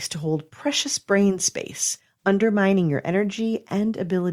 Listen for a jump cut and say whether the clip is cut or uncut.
uncut